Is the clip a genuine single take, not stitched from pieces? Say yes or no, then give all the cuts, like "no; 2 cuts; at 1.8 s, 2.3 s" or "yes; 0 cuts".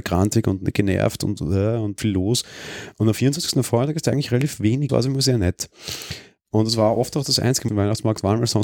no; 3 cuts; at 2.0 s, 4.9 s, 7.7 s